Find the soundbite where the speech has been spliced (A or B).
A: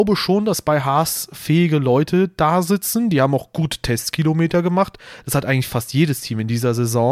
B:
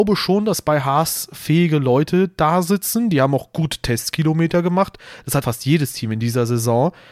B